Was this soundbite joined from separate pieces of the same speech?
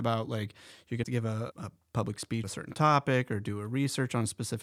yes; 3 cuts; at 1.0 s, 1.5 s, 2.4 s

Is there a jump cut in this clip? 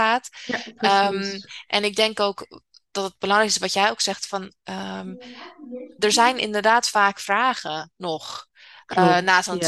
no; 0 cuts

